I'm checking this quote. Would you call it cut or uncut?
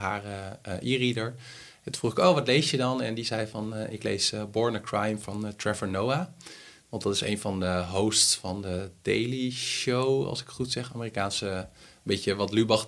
uncut